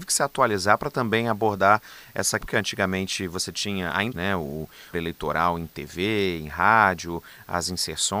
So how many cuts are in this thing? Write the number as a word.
three